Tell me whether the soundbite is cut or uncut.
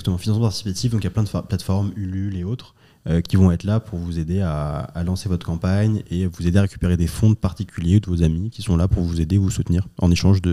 uncut